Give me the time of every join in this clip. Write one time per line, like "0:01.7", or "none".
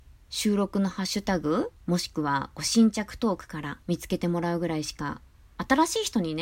0:01.8
0:03.8